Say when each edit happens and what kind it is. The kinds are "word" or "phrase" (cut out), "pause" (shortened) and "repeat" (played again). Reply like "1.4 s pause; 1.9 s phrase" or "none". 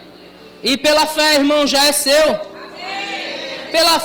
none